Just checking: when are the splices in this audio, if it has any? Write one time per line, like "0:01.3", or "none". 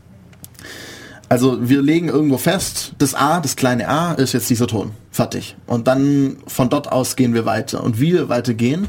0:05.1